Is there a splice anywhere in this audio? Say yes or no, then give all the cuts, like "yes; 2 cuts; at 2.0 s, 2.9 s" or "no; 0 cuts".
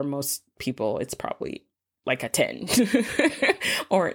no; 0 cuts